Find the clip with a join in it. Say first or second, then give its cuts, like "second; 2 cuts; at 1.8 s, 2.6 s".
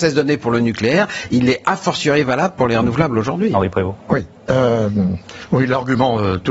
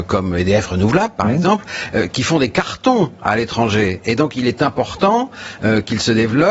first; 1 cut; at 4.0 s